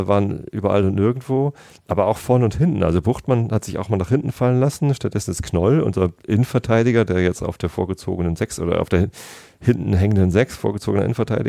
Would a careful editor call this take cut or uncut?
uncut